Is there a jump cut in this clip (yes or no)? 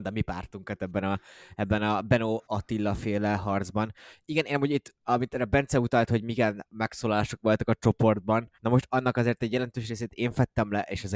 yes